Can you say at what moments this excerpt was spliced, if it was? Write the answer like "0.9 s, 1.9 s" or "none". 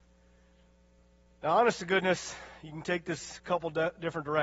none